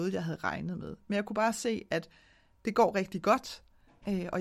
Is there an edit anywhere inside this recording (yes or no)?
no